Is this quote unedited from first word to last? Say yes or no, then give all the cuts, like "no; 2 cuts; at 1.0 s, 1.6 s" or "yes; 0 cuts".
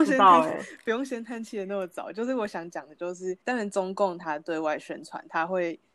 no; 1 cut; at 3.4 s